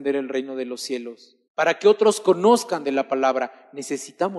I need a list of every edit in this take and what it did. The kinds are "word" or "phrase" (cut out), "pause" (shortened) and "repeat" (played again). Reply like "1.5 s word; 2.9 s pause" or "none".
1.5 s pause